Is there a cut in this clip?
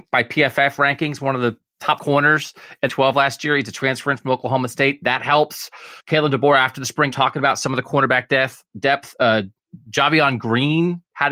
yes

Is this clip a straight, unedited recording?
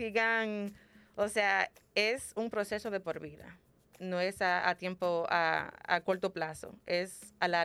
yes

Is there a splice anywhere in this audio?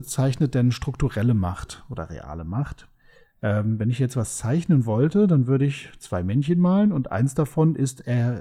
no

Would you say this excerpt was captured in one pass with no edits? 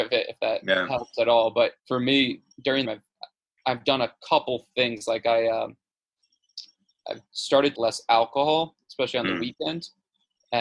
no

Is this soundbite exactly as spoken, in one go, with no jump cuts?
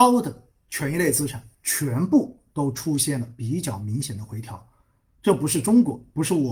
no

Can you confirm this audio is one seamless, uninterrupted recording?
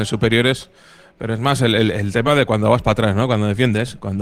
yes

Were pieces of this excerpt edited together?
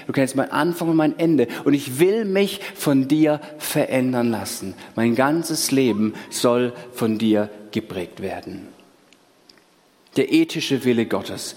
no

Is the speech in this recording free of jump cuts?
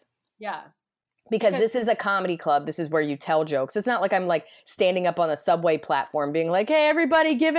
yes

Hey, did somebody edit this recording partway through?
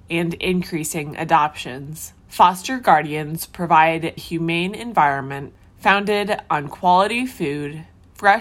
yes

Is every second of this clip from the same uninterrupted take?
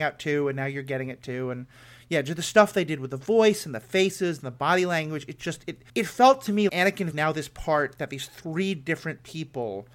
no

